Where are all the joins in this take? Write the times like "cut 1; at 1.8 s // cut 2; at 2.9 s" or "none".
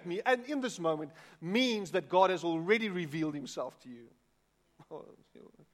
none